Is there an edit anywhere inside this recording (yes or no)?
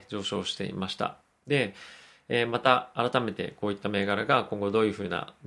no